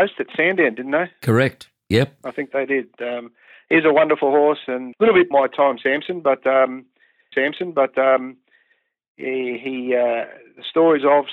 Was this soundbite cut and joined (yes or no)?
yes